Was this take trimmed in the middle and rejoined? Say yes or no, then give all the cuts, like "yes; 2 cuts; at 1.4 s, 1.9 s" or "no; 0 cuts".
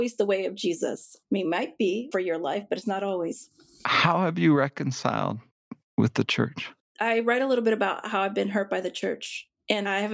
yes; 1 cut; at 6.8 s